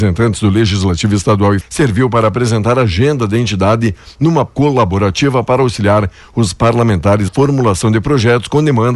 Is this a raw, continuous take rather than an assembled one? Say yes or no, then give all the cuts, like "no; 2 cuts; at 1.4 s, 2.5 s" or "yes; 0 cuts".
no; 3 cuts; at 1.6 s, 4.5 s, 7.3 s